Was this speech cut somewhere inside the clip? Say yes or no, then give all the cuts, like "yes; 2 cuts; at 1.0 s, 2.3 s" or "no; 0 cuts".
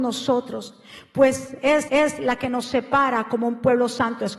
yes; 1 cut; at 1.9 s